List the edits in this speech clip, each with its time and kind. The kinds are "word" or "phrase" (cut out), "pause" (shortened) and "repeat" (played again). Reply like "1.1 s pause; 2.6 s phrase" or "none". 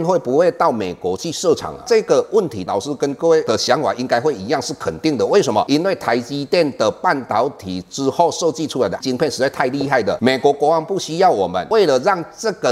9.0 s word